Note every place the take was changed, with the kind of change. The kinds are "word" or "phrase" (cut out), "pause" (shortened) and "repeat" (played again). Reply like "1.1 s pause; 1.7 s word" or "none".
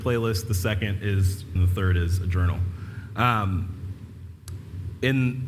1.6 s phrase